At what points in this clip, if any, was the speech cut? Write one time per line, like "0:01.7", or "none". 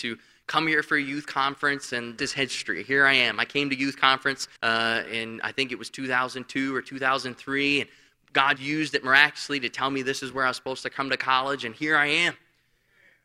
0:02.2
0:04.6
0:08.6